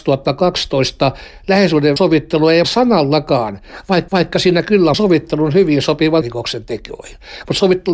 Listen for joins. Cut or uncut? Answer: cut